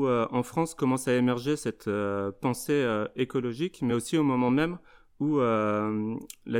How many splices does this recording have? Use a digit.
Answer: 0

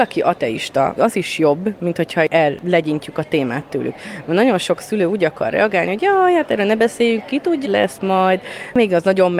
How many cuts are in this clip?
2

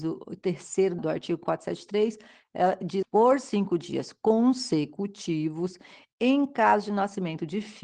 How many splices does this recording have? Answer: 2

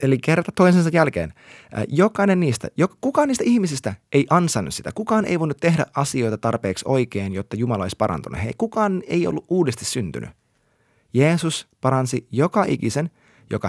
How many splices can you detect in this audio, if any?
0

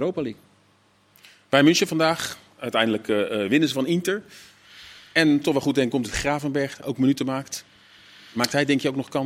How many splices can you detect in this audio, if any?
2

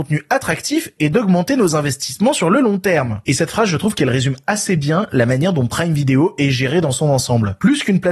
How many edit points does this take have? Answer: 0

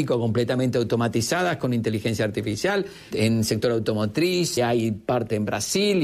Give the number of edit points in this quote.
2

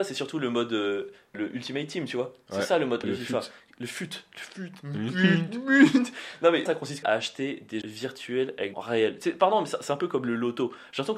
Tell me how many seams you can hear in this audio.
6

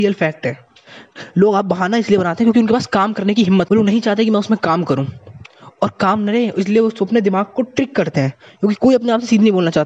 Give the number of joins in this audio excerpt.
1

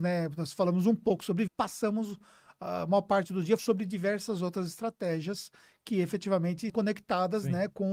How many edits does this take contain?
3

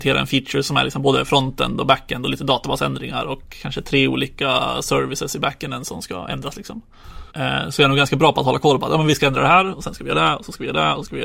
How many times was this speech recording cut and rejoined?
1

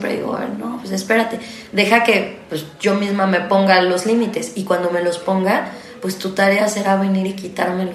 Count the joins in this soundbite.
0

